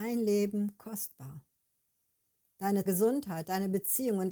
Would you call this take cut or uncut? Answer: cut